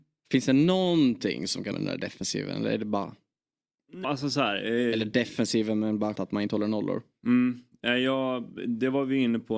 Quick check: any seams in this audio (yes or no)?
yes